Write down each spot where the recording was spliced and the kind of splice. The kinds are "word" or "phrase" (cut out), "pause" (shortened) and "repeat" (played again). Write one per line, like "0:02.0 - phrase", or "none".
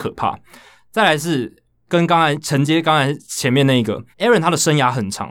0:04.1 - pause

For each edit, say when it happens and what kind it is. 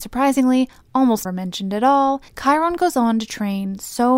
0:01.2 - word
0:02.3 - pause

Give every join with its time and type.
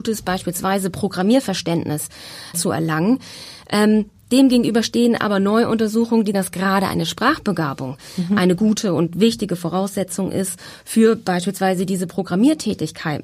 0:02.5 - word
0:06.3 - word

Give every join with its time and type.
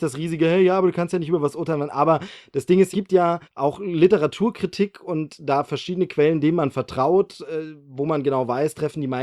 0:02.9 - phrase
0:03.4 - pause

